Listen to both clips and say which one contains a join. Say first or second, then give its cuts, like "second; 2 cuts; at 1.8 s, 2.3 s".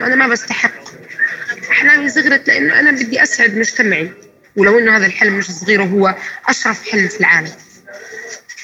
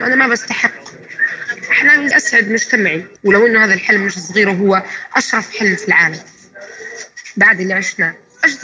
second; 2 cuts; at 2.1 s, 3.2 s